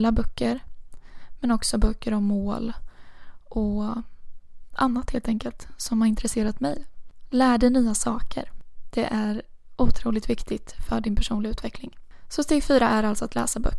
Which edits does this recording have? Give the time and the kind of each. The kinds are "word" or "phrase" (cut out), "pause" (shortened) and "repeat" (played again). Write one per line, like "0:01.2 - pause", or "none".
none